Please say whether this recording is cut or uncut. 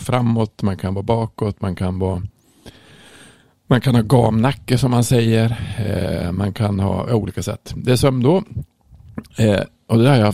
uncut